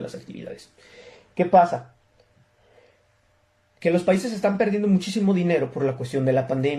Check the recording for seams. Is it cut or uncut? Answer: uncut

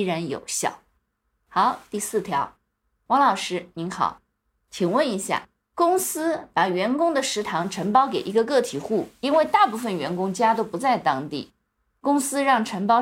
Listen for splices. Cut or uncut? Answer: uncut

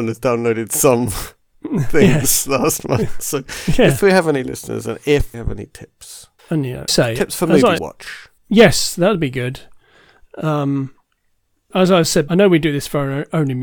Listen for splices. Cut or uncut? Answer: cut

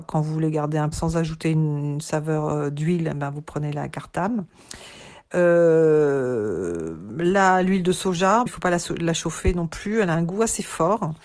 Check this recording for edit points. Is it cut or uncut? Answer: cut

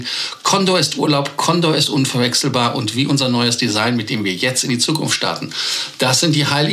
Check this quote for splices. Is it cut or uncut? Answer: uncut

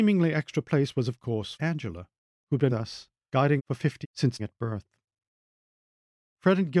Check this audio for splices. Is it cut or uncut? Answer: cut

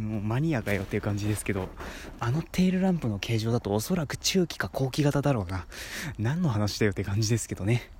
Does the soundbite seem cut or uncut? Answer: cut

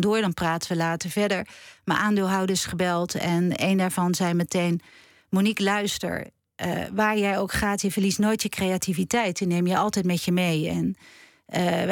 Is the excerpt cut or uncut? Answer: uncut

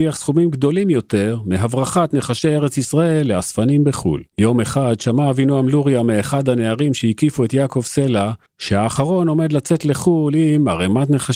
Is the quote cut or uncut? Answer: cut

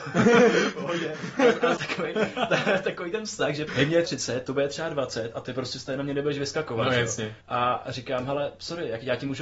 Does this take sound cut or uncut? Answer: cut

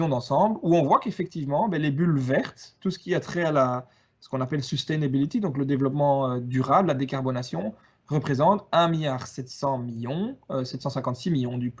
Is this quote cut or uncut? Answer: uncut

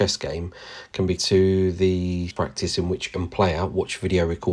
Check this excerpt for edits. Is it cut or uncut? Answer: cut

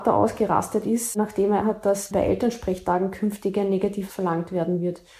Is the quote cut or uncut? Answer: cut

